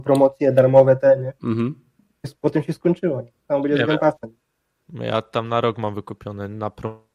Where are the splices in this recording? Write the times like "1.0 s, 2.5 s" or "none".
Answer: 1.4 s